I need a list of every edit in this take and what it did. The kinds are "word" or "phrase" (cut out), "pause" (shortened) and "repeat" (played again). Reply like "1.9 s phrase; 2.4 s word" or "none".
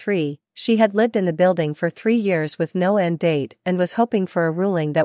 none